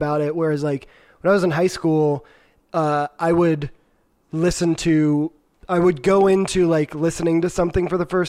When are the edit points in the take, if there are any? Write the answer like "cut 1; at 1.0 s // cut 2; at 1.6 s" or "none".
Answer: none

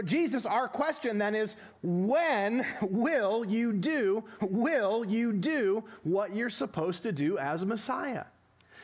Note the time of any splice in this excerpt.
cut 1; at 4.4 s

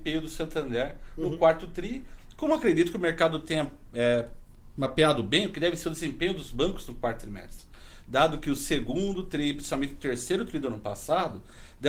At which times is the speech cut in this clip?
none

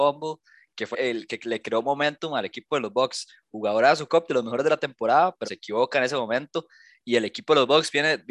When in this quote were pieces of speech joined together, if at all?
cut 1; at 0.9 s // cut 2; at 4.1 s // cut 3; at 5.4 s

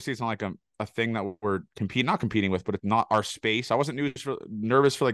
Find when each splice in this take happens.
cut 1; at 2.8 s

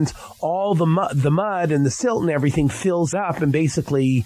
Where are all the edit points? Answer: cut 1; at 3.1 s

